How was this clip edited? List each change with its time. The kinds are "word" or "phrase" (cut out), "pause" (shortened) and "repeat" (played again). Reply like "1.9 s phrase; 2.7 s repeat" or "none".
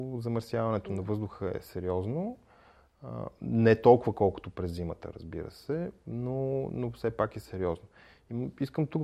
none